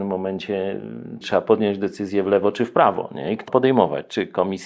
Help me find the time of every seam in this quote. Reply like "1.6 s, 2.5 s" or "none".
1.2 s, 3.5 s